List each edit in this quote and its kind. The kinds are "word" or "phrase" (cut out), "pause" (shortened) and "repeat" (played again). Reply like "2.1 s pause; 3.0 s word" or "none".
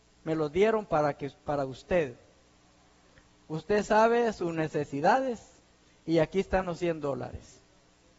none